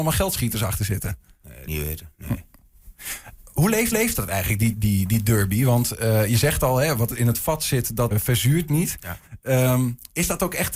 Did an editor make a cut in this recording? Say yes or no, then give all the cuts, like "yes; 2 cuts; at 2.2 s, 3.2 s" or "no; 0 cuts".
yes; 4 cuts; at 1.7 s, 3.9 s, 4.7 s, 8.1 s